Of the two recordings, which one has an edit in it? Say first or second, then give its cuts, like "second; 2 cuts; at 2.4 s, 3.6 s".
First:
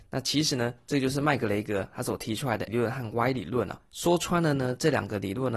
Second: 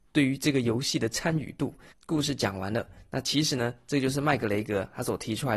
first; 1 cut; at 2.7 s